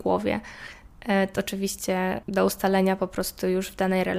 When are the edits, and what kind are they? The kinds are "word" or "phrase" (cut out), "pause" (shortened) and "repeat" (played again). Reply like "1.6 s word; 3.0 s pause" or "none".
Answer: 1.4 s word; 2.2 s pause